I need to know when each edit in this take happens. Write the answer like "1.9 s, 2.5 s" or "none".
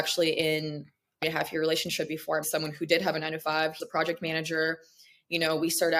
1.2 s, 2.4 s, 3.8 s